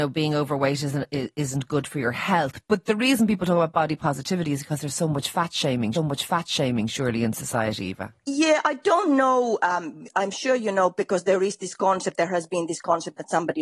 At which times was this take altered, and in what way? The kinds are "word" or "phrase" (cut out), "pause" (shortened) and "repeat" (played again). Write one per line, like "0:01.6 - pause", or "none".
0:02.6 - word
0:05.9 - repeat
0:08.2 - pause